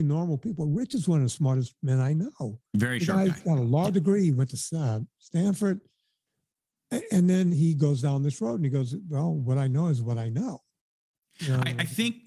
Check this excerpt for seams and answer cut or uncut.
uncut